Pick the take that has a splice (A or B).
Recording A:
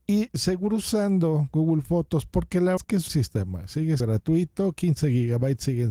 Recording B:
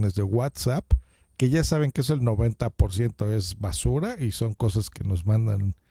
A